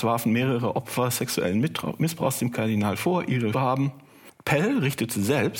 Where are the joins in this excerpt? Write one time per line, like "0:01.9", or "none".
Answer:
0:03.5